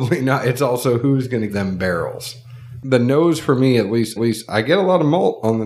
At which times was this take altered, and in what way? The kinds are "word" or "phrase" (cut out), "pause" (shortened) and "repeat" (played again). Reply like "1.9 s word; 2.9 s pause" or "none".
1.5 s word; 4.2 s repeat